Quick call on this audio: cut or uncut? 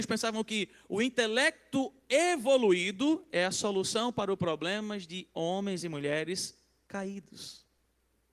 uncut